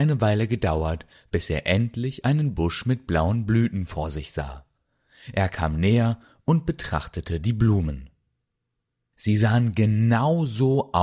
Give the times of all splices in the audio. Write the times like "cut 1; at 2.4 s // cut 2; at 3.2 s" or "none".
none